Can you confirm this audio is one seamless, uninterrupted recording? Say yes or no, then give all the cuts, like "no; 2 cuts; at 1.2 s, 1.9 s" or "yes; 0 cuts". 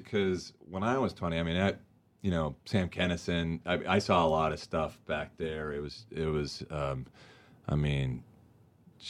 yes; 0 cuts